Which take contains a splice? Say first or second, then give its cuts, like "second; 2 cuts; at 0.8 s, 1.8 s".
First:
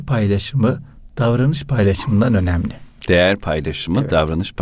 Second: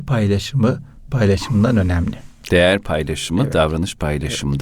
second; 1 cut; at 1.1 s